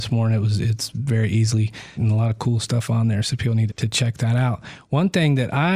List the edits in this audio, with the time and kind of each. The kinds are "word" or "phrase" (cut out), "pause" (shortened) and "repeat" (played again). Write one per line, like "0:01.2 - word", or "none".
0:02.0 - phrase
0:03.7 - word